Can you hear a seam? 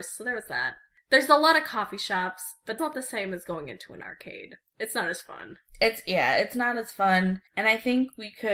yes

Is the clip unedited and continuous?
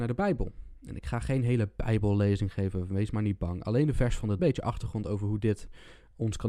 no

